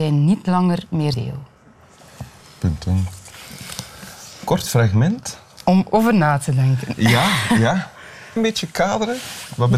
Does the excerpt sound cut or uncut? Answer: cut